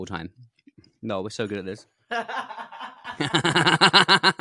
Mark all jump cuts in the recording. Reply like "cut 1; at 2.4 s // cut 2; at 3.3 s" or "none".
none

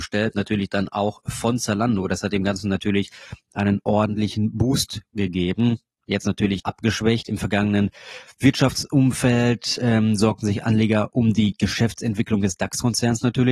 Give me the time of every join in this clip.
cut 1; at 6.6 s

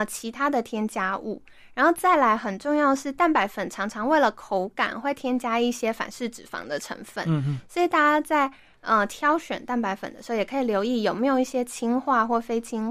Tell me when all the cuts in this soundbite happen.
none

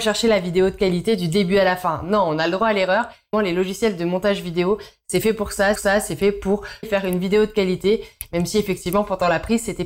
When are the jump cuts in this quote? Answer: cut 1; at 3.3 s // cut 2; at 5.8 s // cut 3; at 6.8 s

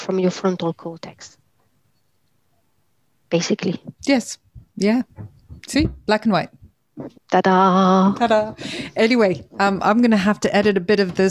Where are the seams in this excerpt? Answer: cut 1; at 3.9 s // cut 2; at 5.6 s // cut 3; at 7.2 s

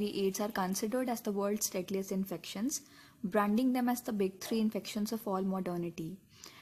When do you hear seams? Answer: none

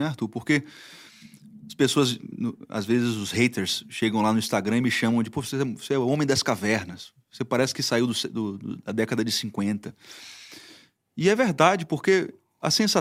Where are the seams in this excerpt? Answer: none

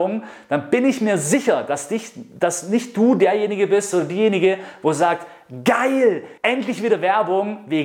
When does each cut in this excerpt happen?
cut 1; at 6.4 s

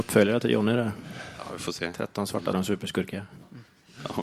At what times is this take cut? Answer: cut 1; at 2.5 s

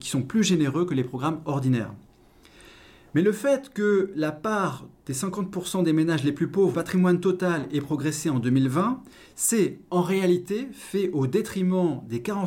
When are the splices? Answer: cut 1; at 6.7 s

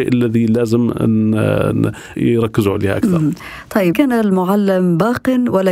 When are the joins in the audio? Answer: cut 1; at 2.1 s // cut 2; at 3.9 s

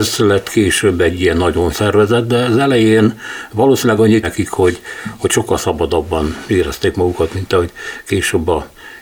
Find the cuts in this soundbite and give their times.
cut 1; at 1.7 s // cut 2; at 4.2 s

